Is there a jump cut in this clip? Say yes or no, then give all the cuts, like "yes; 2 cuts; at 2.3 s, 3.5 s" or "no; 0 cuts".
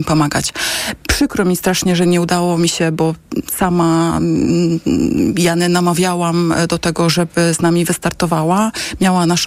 no; 0 cuts